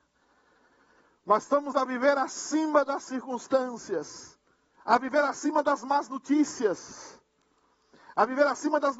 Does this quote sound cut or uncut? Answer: cut